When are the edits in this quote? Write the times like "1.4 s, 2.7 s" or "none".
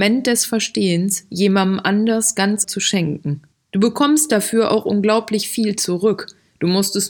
2.6 s, 3.5 s